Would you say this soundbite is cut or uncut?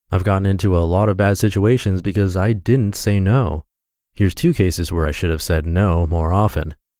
uncut